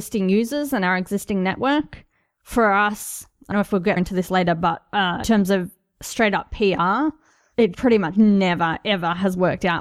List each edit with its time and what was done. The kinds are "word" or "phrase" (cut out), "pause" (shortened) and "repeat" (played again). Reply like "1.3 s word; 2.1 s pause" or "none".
3.5 s word; 4.0 s word; 5.2 s word; 7.7 s word